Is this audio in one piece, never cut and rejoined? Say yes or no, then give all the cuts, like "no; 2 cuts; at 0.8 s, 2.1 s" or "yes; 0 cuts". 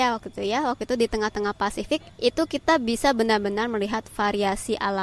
no; 1 cut; at 2.1 s